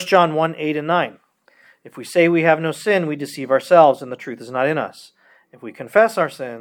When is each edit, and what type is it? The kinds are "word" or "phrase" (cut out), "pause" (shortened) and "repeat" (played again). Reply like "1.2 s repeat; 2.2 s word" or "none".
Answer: 1.5 s pause